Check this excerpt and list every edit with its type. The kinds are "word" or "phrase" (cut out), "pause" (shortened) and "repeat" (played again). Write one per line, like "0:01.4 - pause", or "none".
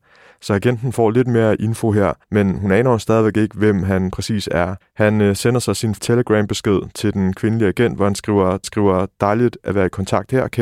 0:02.2 - pause
0:04.8 - pause
0:06.0 - word
0:08.6 - repeat